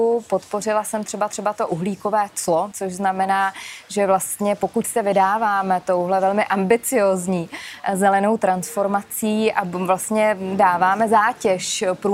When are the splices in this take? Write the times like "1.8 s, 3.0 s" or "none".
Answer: 1.3 s, 2.7 s, 4.8 s